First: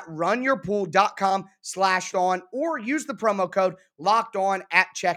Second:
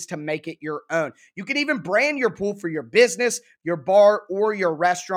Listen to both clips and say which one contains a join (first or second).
first